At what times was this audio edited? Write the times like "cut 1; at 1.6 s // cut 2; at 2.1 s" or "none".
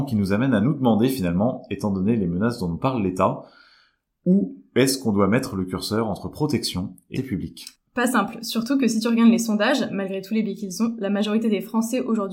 cut 1; at 7.2 s